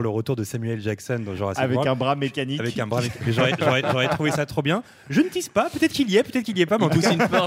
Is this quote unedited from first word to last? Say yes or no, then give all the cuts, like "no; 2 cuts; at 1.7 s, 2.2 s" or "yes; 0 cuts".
yes; 0 cuts